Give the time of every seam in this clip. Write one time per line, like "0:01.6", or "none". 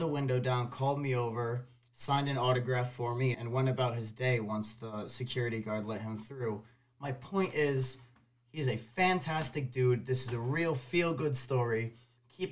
0:03.3

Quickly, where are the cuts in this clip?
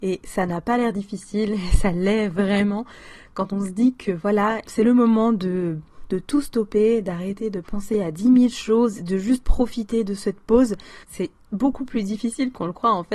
0:11.0

